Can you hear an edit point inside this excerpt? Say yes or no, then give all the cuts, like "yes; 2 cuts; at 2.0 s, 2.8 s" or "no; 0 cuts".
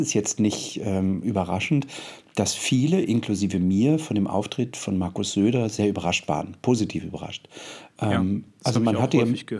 no; 0 cuts